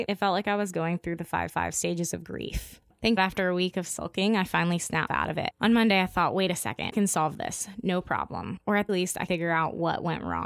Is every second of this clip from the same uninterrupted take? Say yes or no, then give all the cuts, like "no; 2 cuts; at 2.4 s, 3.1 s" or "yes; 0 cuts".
no; 6 cuts; at 1.5 s, 3.2 s, 5.1 s, 6.9 s, 8.9 s, 9.3 s